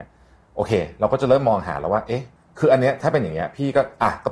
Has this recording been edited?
yes; 1 cut; at 2.4 s

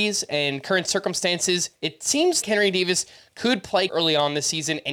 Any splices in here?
yes; 2 cuts; at 2.4 s, 3.9 s

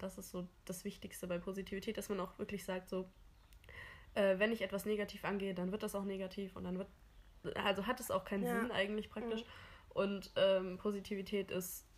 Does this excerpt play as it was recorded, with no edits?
yes; 0 cuts

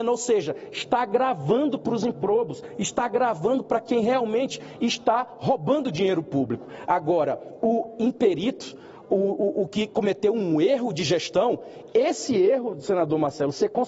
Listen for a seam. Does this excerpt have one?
no; 0 cuts

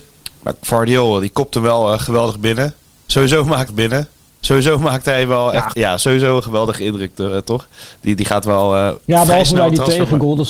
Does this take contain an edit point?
yes; 2 cuts; at 3.7 s, 5.7 s

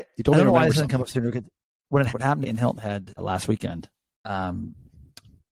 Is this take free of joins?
no; 3 cuts; at 2.1 s, 2.4 s, 3.2 s

